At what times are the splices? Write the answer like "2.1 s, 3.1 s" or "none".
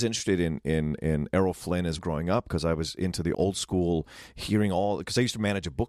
2.0 s, 3.3 s